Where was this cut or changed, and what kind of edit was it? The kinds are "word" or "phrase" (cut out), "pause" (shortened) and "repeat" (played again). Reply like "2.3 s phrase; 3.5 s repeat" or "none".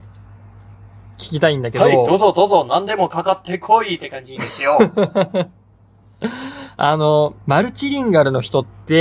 7.4 s pause